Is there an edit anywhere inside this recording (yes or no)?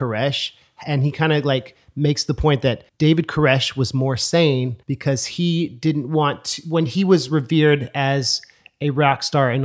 yes